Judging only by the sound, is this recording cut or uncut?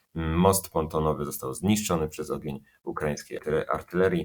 uncut